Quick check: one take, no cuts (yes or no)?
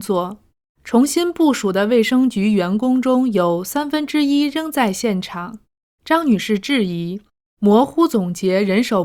yes